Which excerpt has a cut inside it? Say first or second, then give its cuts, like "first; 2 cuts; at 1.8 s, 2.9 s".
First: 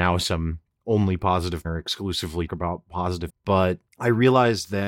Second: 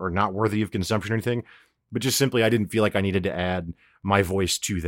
first; 4 cuts; at 1.6 s, 2.5 s, 3.3 s, 3.9 s